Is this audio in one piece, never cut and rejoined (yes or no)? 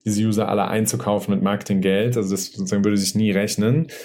yes